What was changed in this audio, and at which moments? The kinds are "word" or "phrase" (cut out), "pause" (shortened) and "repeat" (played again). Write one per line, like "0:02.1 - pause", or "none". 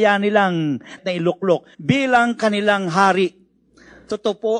0:01.0 - word
0:01.7 - pause